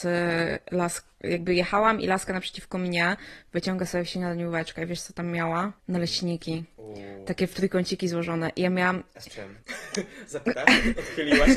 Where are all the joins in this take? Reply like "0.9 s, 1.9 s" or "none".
5.8 s, 9.6 s